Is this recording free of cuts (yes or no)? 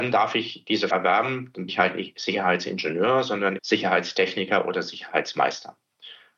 no